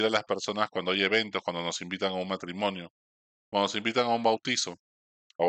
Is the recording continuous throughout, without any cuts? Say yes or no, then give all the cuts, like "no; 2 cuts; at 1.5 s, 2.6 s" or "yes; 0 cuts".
yes; 0 cuts